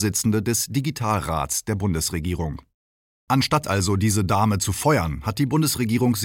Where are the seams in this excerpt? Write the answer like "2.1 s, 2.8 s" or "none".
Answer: none